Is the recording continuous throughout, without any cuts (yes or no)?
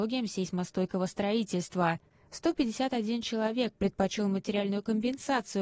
yes